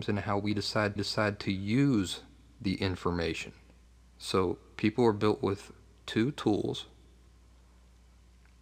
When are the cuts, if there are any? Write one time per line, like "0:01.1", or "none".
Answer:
0:01.0
0:03.8